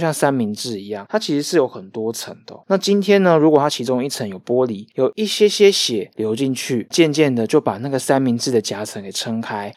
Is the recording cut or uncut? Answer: cut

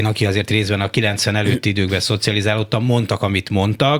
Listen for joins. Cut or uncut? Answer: uncut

